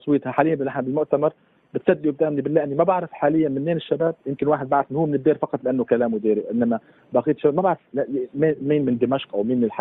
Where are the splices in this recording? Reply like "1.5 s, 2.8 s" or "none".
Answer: none